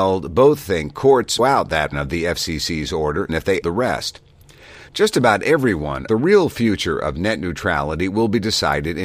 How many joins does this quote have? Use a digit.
5